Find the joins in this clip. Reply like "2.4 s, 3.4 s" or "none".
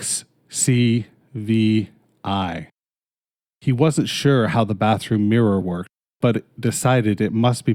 none